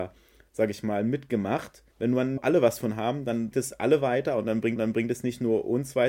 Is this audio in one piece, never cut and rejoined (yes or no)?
no